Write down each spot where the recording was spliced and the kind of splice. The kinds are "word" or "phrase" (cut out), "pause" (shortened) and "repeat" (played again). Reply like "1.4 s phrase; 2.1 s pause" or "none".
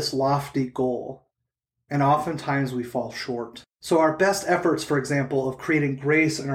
none